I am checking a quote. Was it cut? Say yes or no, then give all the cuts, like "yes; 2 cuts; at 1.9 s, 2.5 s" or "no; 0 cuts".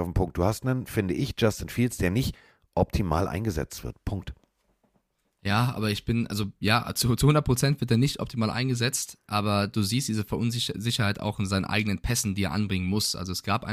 no; 0 cuts